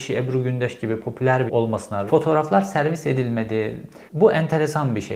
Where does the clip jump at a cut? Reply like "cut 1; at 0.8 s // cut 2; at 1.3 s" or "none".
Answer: cut 1; at 1.5 s // cut 2; at 2.1 s // cut 3; at 4.1 s